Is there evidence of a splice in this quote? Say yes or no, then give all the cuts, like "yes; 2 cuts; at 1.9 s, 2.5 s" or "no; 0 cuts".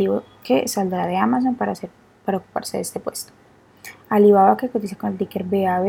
no; 0 cuts